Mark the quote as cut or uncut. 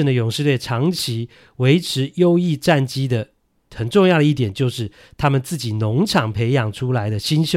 uncut